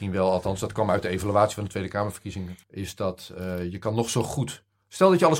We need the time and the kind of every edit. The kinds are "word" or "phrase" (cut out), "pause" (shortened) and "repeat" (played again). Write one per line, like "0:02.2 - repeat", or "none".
0:02.6 - pause